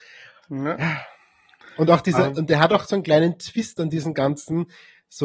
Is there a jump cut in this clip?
no; 0 cuts

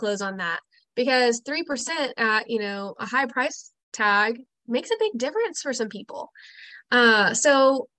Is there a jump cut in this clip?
yes; 1 cut; at 3.8 s

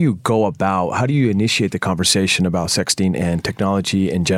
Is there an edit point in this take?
no; 0 cuts

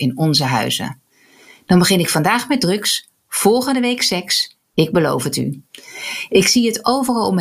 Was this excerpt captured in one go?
yes; 0 cuts

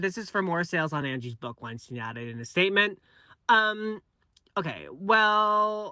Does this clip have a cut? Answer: no; 0 cuts

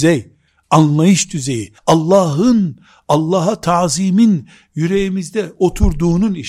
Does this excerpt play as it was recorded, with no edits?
no; 1 cut; at 1.8 s

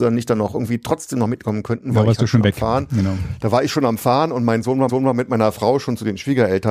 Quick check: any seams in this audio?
yes; 1 cut; at 4.9 s

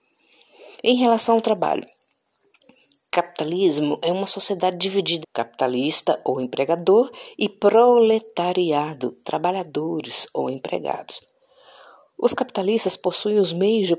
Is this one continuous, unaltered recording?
no; 1 cut; at 5.2 s

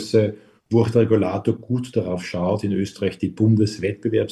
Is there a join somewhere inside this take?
no; 0 cuts

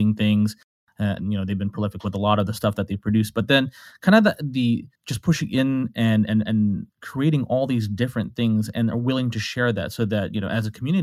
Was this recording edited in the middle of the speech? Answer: yes; 2 cuts; at 4.9 s, 6.9 s

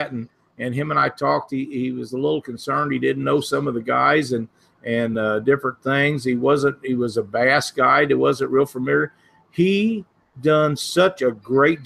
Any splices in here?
no; 0 cuts

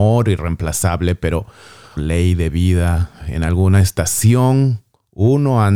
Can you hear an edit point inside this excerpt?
yes; 1 cut; at 2.0 s

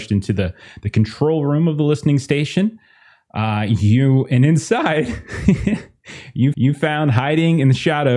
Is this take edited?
yes; 1 cut; at 6.5 s

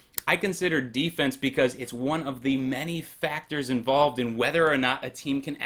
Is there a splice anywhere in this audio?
no; 0 cuts

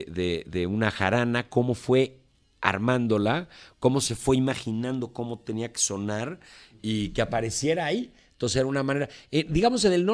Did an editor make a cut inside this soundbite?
no; 0 cuts

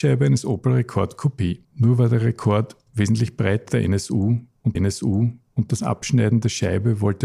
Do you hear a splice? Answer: yes; 3 cuts; at 1.6 s, 3.7 s, 4.7 s

